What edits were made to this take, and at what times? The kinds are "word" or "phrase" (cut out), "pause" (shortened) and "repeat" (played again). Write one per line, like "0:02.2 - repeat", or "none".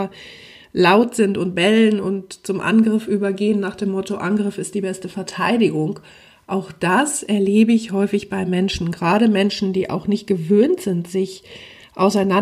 none

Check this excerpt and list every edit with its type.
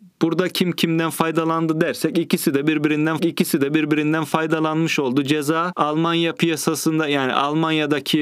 0:03.2 - repeat

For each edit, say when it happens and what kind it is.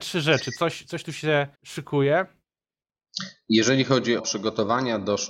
0:01.5 - pause
0:04.2 - word

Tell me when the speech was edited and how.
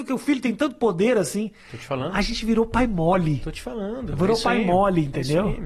none

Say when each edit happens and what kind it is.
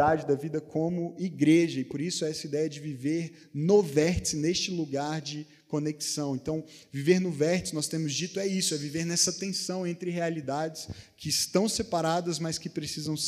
none

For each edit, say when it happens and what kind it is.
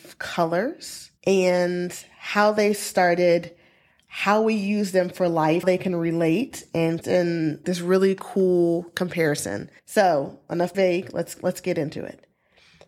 0:01.2 - pause
0:05.6 - word
0:07.0 - word
0:07.6 - word
0:09.8 - pause
0:10.7 - word

